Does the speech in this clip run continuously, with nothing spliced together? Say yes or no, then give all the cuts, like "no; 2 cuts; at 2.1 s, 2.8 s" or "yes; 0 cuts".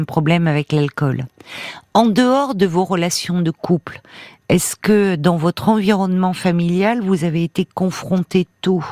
yes; 0 cuts